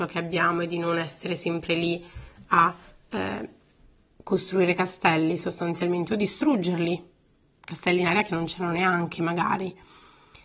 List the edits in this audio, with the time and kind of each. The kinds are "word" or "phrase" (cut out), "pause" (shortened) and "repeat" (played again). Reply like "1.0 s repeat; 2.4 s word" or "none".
none